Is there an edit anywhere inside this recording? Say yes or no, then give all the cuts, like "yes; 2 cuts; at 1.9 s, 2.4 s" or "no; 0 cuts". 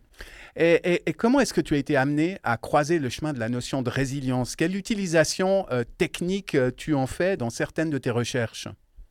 yes; 1 cut; at 7.4 s